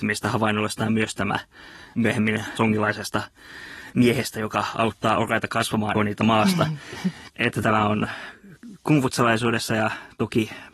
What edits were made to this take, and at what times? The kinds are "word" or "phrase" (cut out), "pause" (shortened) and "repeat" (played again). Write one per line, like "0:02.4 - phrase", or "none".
0:02.6 - phrase
0:05.9 - phrase

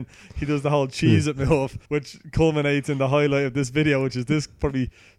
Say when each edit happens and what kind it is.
0:01.8 - pause

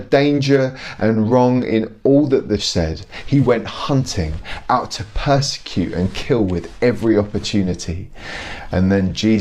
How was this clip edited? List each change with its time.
0:02.6 - word

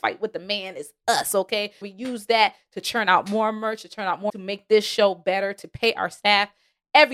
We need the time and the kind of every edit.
0:01.8 - word
0:04.3 - word

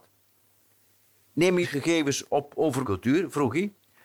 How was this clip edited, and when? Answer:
0:01.6 - phrase
0:02.8 - word

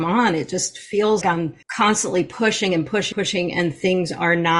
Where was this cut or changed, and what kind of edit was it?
0:01.2 - word
0:01.6 - pause
0:03.1 - word

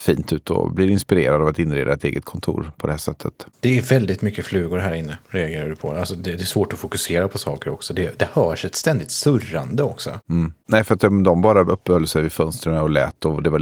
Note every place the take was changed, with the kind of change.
0:03.5 - pause
0:05.2 - pause

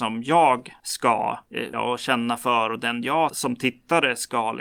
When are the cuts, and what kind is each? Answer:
0:01.7 - word
0:03.3 - word

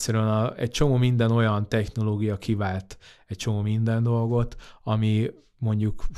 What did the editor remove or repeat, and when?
none

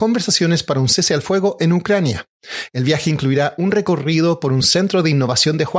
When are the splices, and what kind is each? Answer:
none

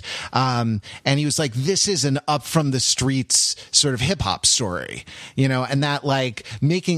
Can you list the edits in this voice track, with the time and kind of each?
none

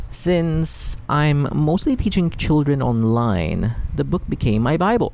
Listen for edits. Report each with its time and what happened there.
none

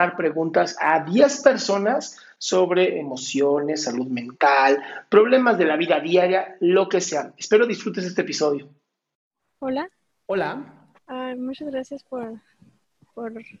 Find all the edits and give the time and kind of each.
0:11.0 - pause

